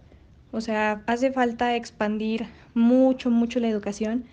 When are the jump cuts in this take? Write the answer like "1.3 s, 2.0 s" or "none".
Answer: none